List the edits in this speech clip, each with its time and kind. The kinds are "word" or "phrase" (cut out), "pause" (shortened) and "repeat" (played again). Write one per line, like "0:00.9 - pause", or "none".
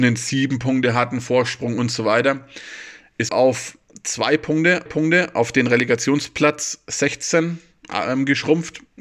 0:03.3 - phrase
0:04.9 - repeat